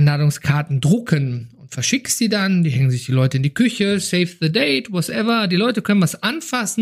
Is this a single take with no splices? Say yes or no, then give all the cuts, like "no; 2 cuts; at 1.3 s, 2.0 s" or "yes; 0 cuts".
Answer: yes; 0 cuts